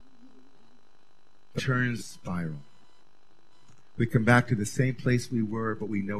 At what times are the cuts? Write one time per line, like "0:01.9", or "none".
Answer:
0:01.6
0:02.0